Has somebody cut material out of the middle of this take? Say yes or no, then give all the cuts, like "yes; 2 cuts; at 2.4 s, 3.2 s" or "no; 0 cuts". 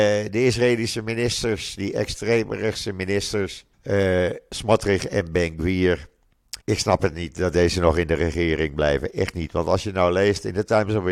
yes; 2 cuts; at 3.7 s, 6.6 s